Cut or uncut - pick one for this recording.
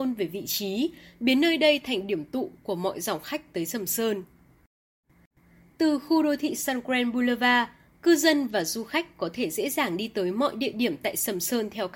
uncut